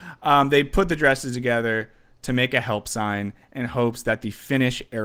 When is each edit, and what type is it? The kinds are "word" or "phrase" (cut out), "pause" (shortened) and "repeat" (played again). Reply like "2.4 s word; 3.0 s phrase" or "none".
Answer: none